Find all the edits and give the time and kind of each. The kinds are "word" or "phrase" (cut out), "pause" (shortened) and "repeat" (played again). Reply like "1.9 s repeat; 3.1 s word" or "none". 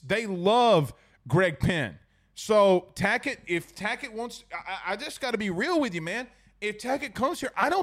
none